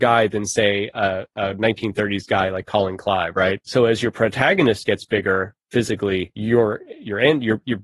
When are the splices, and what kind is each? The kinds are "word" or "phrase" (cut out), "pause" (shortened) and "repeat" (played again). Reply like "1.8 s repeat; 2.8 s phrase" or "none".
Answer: none